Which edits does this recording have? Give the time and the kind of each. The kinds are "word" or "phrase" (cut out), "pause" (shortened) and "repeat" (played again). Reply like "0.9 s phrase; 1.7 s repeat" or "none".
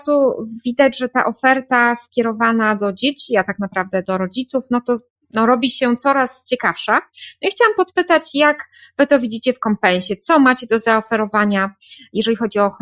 none